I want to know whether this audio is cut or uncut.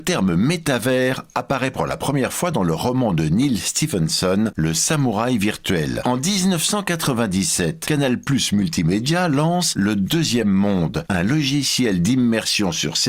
uncut